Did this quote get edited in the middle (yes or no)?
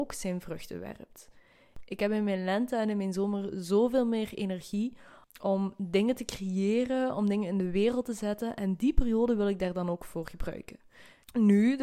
no